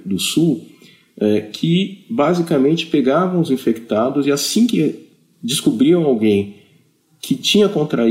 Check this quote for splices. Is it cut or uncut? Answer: uncut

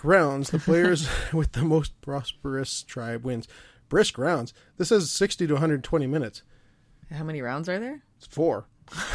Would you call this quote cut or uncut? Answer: uncut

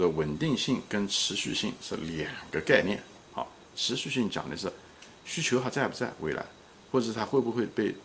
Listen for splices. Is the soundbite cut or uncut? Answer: uncut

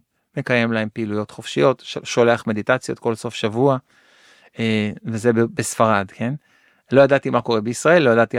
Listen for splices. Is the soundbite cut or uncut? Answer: uncut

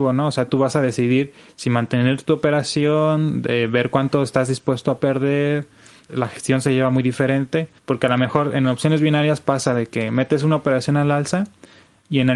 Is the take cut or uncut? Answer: cut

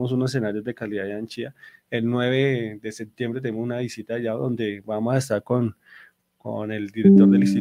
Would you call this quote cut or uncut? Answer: uncut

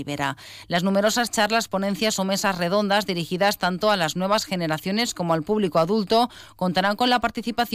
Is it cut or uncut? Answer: uncut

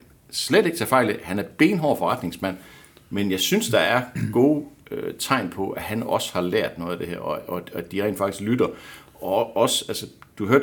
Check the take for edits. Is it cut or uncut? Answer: uncut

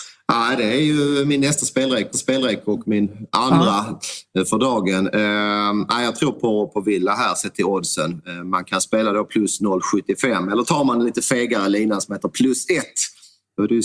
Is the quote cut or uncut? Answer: cut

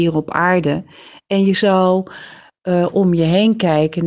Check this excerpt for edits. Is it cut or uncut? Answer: uncut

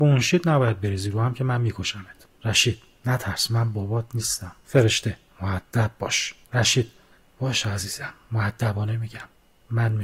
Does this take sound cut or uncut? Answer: cut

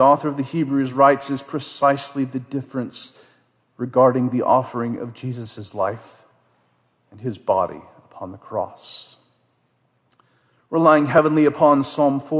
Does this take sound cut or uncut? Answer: uncut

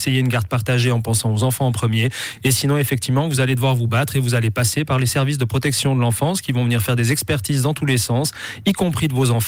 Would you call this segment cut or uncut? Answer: uncut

